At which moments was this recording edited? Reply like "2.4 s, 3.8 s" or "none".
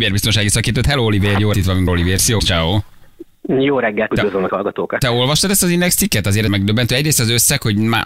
1.5 s, 1.9 s, 2.4 s, 4.1 s, 4.5 s, 6.5 s